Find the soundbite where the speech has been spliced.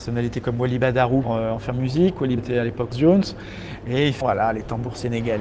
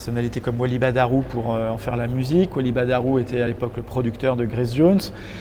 first; 5 cuts; at 1.2 s, 1.7 s, 2.4 s, 2.9 s, 4.2 s

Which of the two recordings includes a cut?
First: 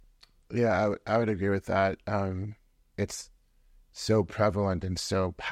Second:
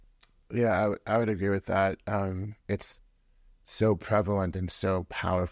second; 1 cut; at 2.6 s

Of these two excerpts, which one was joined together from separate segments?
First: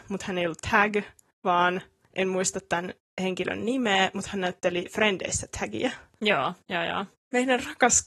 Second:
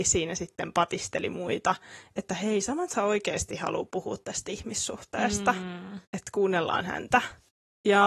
second; 1 cut; at 6.0 s

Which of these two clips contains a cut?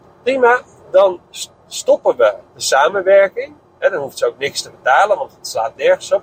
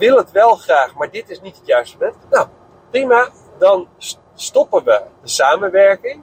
second; 1 cut; at 2.2 s

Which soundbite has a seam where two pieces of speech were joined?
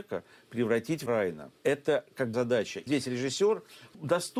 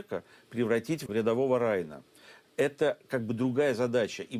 first; 4 cuts; at 1.1 s, 1.6 s, 2.3 s, 2.9 s

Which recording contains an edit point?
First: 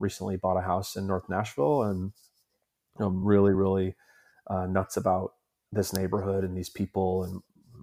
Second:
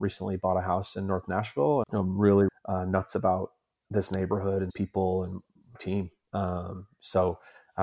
second; 4 cuts; at 1.8 s, 2.5 s, 4.7 s, 5.8 s

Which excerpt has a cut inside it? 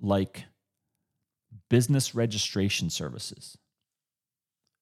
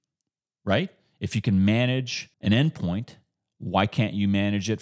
second; 1 cut; at 2.3 s

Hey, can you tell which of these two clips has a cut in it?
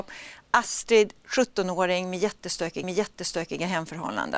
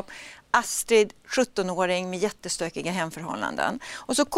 first; 1 cut; at 2.8 s

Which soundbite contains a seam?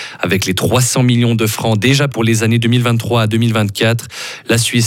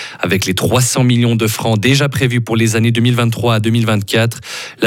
first; 1 cut; at 2.1 s

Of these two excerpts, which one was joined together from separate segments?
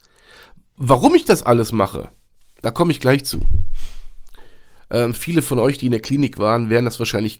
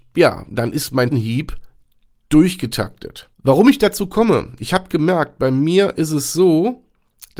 second; 2 cuts; at 1.1 s, 3.3 s

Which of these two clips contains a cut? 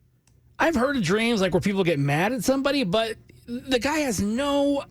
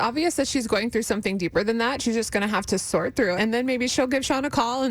second; 1 cut; at 3.4 s

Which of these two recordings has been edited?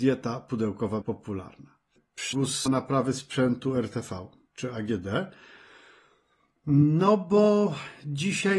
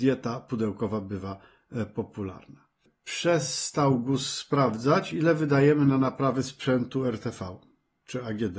first; 4 cuts; at 1.0 s, 2.3 s, 2.7 s, 4.5 s

